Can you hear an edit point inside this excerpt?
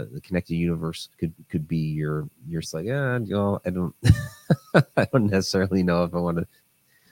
yes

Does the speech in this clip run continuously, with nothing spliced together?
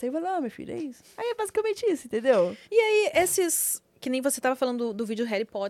no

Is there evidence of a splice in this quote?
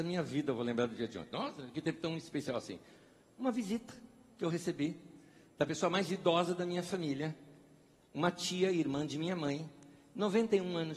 no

